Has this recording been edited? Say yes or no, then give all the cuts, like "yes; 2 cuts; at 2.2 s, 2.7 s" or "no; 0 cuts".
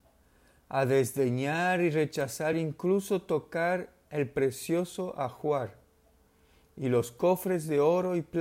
no; 0 cuts